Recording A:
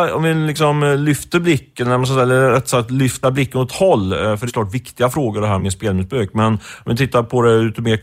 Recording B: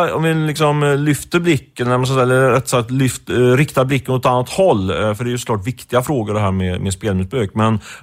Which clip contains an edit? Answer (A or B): A